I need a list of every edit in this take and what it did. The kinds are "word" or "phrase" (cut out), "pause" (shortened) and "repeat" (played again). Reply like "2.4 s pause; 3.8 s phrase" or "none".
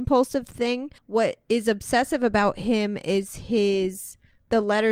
1.0 s pause